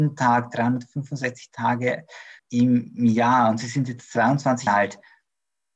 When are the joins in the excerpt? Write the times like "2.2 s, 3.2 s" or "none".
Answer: 2.4 s, 4.7 s

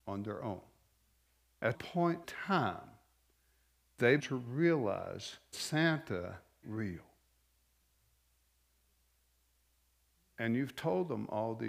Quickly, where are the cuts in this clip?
1.7 s, 2.2 s, 4.2 s, 5.5 s, 6.6 s

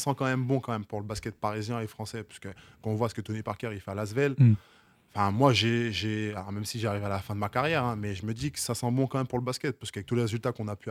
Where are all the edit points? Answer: none

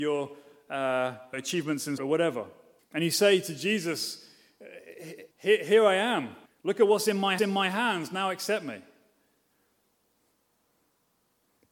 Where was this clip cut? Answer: 1.3 s, 2.0 s, 2.8 s, 5.3 s, 6.5 s, 7.4 s

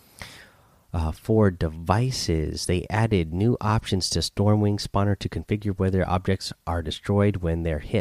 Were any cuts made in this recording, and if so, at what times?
none

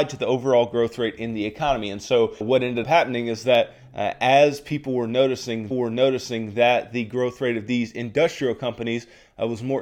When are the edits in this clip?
2.4 s, 2.8 s, 5.7 s

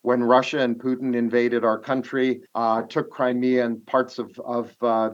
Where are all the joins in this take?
2.5 s

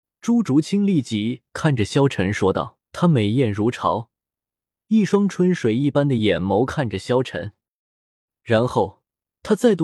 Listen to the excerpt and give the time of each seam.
2.9 s

